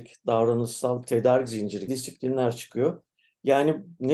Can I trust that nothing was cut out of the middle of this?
no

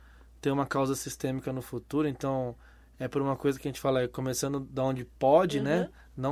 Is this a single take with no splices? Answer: yes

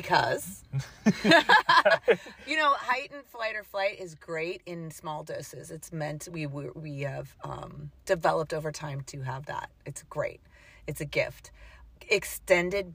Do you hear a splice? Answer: no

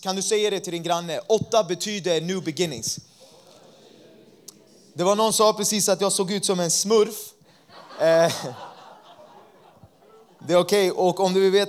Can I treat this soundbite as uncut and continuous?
no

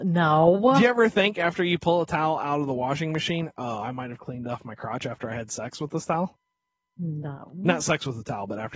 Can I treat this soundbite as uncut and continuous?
yes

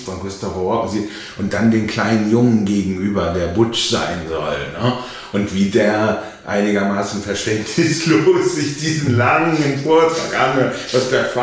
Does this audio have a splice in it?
no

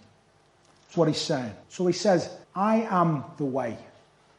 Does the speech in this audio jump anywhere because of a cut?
yes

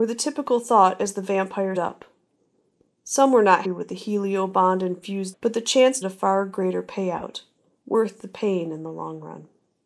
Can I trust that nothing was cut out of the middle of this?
no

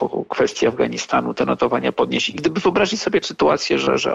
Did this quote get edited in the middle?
yes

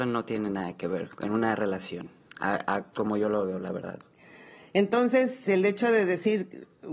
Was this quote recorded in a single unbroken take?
yes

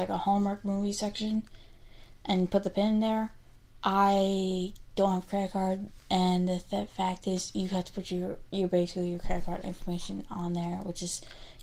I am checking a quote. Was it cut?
no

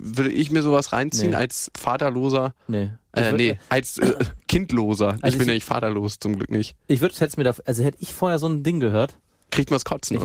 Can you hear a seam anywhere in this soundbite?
no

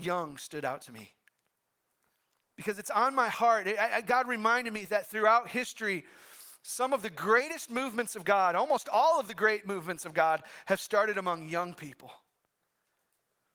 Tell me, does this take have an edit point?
no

